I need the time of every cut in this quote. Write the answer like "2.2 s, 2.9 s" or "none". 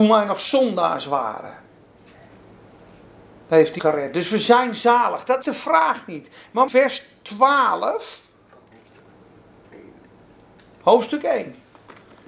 3.8 s, 5.4 s, 6.7 s

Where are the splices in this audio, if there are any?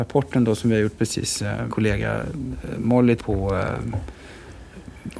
1.7 s, 3.2 s

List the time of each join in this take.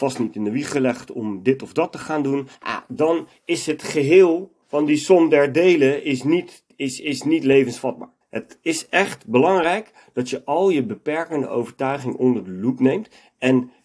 2.5 s, 4.6 s, 8.2 s

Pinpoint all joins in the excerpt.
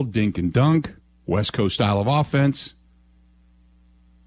none

